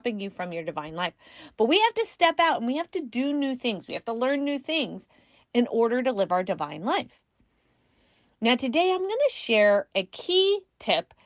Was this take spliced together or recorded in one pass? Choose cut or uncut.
uncut